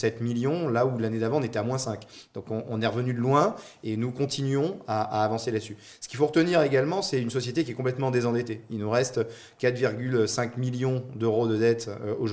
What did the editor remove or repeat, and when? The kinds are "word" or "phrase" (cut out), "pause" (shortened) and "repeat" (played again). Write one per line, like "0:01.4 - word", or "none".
none